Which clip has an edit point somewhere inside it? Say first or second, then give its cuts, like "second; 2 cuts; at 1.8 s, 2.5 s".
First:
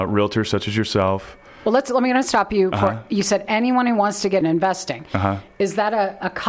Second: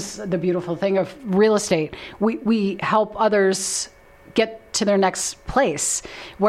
first; 1 cut; at 4.4 s